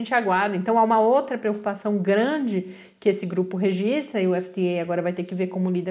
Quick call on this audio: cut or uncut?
uncut